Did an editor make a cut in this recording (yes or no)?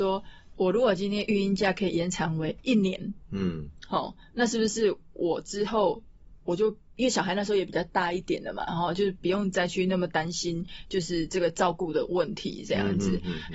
no